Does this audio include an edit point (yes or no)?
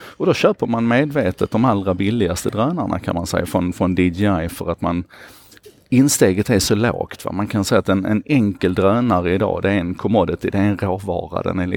no